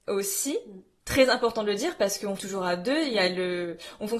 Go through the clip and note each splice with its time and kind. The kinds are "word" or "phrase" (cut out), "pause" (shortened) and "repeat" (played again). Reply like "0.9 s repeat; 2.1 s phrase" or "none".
2.4 s word